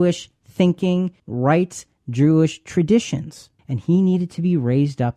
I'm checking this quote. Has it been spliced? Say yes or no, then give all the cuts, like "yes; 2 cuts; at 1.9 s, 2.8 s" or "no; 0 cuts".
yes; 2 cuts; at 1.2 s, 3.6 s